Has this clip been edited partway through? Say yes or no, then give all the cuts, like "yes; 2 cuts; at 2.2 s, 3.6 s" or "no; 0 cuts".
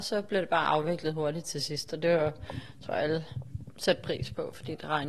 no; 0 cuts